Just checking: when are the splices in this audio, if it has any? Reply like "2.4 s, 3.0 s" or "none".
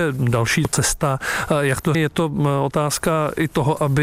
1.9 s

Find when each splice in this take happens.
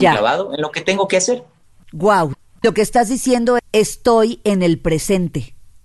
3.6 s

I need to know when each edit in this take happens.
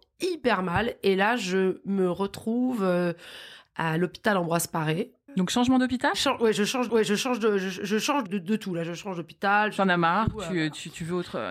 6.9 s, 8.3 s

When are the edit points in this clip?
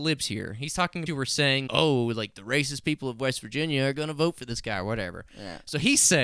1.1 s, 1.7 s

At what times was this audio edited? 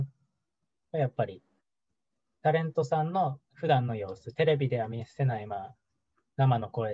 3.5 s

